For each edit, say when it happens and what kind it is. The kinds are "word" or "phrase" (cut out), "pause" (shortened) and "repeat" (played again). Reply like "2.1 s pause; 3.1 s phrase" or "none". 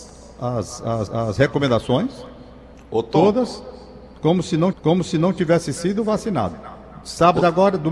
1.1 s repeat; 4.7 s repeat